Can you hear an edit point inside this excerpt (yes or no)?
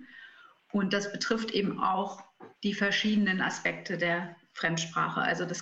yes